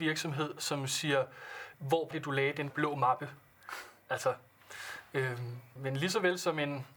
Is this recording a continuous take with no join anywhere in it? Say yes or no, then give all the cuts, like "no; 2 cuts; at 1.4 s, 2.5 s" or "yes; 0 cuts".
no; 4 cuts; at 1.7 s, 2.1 s, 2.7 s, 5.8 s